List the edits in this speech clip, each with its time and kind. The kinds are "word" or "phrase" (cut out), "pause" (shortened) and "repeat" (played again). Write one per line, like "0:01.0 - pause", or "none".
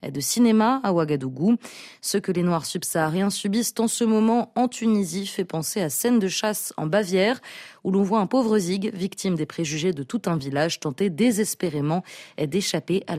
none